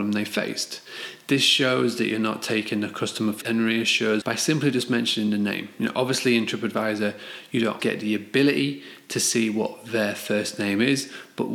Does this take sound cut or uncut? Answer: cut